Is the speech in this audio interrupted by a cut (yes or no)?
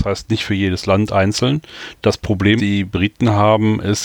yes